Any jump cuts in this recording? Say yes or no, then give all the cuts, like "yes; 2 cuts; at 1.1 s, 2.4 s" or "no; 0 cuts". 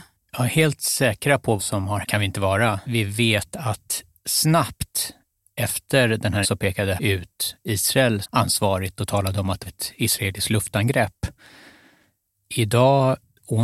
yes; 8 cuts; at 1.6 s, 2.0 s, 2.8 s, 4.2 s, 6.4 s, 7.0 s, 8.2 s, 9.7 s